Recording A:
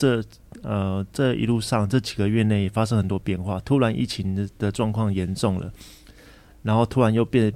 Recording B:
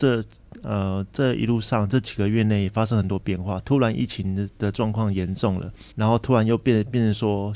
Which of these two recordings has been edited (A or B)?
B